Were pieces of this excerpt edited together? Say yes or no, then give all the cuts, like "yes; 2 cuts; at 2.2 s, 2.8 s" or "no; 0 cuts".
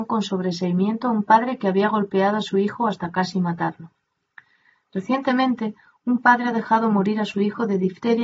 no; 0 cuts